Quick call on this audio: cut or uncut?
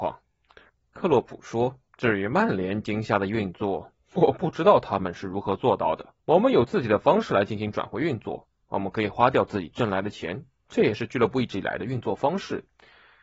cut